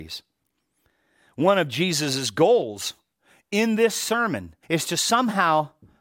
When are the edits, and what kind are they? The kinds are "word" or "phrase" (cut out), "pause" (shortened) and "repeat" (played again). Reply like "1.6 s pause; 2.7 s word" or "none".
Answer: 3.1 s pause; 4.6 s pause